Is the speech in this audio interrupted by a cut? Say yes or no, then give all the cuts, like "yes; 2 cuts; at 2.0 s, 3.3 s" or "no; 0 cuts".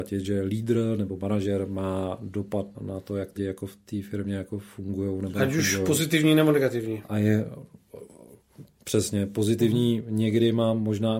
yes; 2 cuts; at 2.7 s, 3.4 s